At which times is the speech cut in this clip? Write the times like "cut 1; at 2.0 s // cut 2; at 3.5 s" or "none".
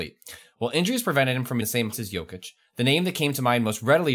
cut 1; at 1.6 s // cut 2; at 1.9 s